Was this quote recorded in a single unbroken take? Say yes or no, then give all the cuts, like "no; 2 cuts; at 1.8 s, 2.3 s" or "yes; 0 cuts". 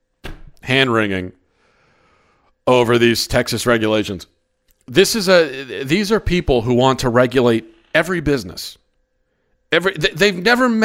yes; 0 cuts